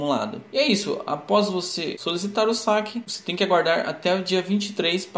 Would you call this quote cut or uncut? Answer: uncut